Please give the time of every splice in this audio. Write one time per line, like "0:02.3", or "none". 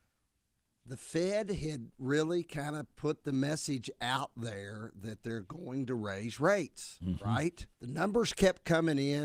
0:07.7